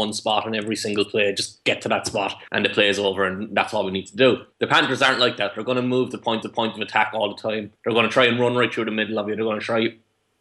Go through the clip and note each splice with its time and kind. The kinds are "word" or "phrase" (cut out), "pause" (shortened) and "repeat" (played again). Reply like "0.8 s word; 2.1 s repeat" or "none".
2.5 s pause; 4.5 s pause; 6.4 s repeat; 7.8 s pause